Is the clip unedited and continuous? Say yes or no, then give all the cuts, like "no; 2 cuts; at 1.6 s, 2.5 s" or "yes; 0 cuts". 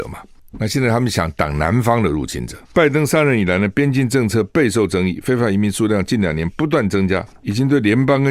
no; 1 cut; at 2.6 s